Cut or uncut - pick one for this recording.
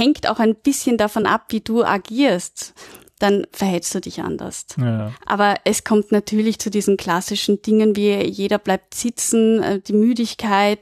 uncut